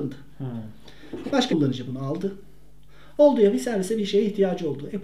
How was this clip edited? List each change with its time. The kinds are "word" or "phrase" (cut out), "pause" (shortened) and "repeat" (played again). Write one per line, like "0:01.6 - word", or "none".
0:01.5 - word